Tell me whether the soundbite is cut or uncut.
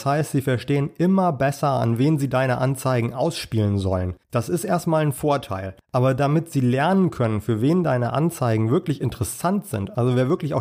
cut